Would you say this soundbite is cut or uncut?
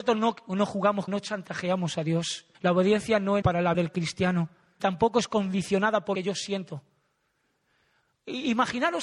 cut